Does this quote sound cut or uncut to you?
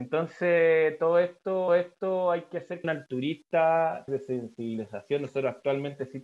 cut